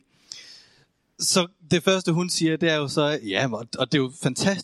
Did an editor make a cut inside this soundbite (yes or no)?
no